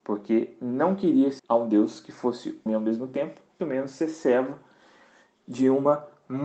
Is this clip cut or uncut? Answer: cut